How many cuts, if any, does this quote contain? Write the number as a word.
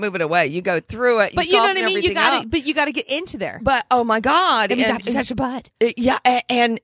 zero